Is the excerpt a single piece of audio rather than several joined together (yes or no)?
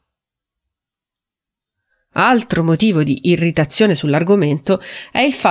yes